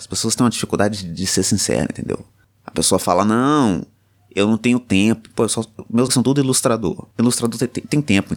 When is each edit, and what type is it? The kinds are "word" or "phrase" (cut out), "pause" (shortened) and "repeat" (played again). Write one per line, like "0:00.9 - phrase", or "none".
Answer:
0:06.1 - word

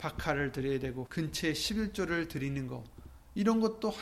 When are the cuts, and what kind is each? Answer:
0:01.1 - word

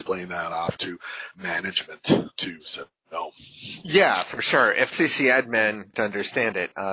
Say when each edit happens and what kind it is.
0:01.3 - word
0:04.9 - word
0:05.9 - word

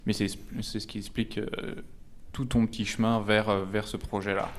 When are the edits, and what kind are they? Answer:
none

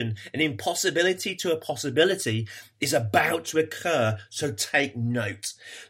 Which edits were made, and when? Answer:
none

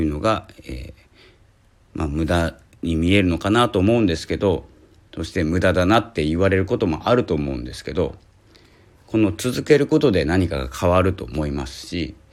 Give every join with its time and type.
none

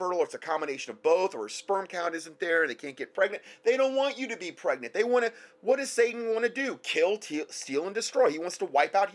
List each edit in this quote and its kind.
none

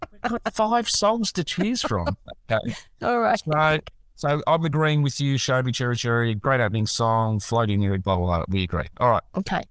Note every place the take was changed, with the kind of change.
none

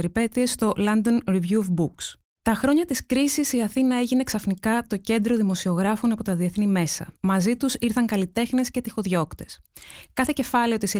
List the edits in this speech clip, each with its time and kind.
0:07.2 - pause

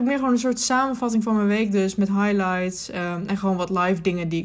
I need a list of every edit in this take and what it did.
none

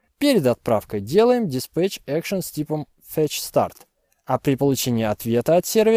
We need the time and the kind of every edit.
none

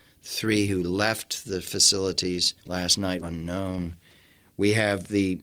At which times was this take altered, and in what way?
0:02.6 - pause
0:03.2 - phrase

